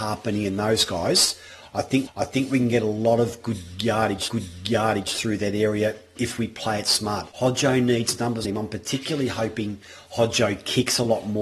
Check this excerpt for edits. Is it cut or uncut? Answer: cut